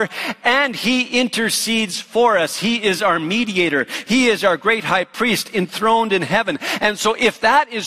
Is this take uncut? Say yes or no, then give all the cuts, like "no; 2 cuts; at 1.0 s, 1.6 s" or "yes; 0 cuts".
yes; 0 cuts